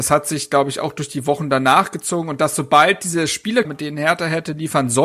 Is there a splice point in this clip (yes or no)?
yes